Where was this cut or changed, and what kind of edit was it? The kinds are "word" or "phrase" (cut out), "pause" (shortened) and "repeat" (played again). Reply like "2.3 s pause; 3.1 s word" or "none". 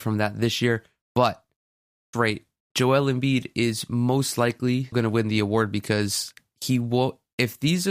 2.1 s phrase; 4.9 s word